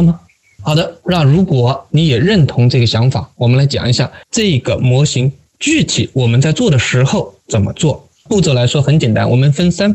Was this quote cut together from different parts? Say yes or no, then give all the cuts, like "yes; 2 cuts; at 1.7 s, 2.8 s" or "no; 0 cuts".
yes; 1 cut; at 4.2 s